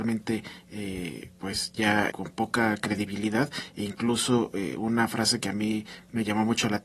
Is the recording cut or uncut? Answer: cut